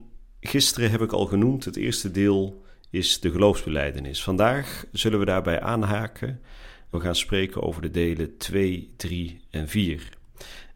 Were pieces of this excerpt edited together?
yes; 1 cut; at 6.9 s

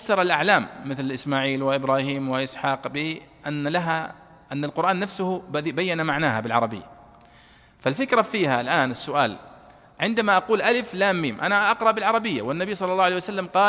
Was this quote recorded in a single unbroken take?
yes; 0 cuts

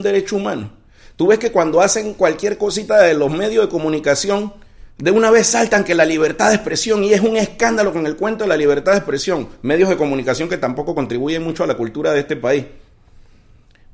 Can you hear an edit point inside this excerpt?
no; 0 cuts

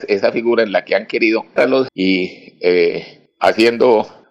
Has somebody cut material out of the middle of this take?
yes; 2 cuts; at 1.6 s, 1.9 s

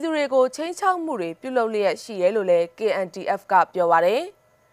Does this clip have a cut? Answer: no; 0 cuts

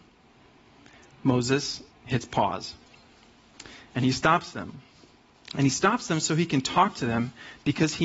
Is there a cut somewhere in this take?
yes; 1 cut; at 1.9 s

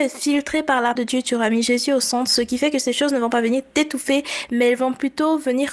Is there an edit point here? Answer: yes; 1 cut; at 1.0 s

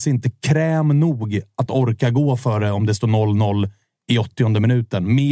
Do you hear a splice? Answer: no; 0 cuts

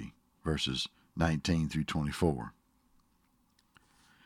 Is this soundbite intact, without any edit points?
yes; 0 cuts

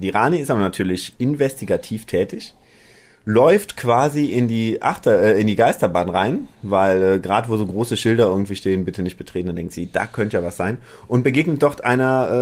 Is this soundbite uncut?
yes; 0 cuts

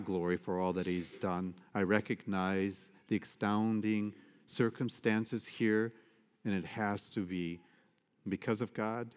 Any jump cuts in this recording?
no; 0 cuts

